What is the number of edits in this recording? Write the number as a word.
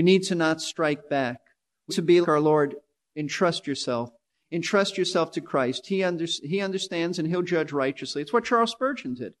three